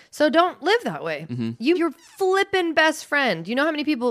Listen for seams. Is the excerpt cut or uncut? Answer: cut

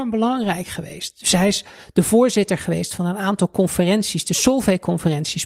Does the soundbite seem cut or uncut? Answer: uncut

